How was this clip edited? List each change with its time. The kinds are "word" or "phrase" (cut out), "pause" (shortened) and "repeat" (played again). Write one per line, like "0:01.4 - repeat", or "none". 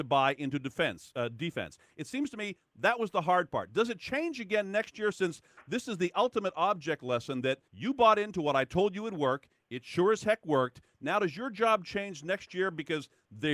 0:07.7 - pause